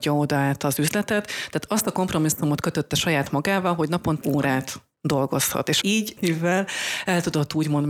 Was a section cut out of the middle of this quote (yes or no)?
yes